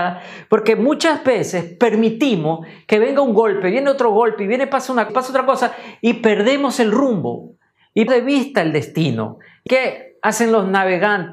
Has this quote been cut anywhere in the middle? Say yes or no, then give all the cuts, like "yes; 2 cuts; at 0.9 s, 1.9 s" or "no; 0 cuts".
yes; 3 cuts; at 5.1 s, 8.1 s, 9.7 s